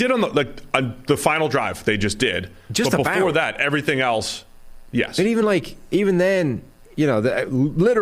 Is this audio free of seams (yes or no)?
yes